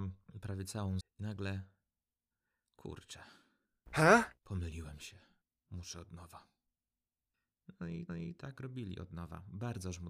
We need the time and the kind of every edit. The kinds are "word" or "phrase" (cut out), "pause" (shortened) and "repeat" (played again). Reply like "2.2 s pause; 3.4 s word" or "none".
1.0 s word; 8.1 s repeat